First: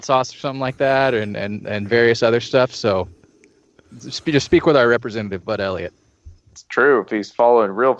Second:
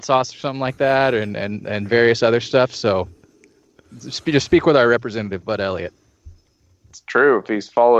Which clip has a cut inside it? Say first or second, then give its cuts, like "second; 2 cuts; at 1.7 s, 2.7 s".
first; 1 cut; at 6.4 s